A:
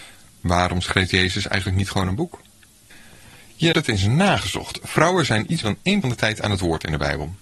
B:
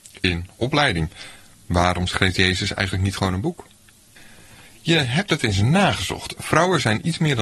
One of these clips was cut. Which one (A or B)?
A